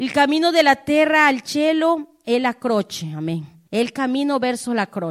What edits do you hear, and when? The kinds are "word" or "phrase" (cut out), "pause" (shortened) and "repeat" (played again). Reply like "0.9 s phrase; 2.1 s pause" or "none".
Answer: 3.7 s pause